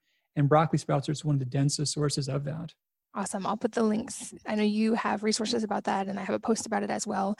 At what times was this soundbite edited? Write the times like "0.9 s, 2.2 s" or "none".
none